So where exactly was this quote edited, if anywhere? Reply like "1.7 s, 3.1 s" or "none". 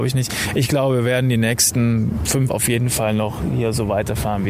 2.5 s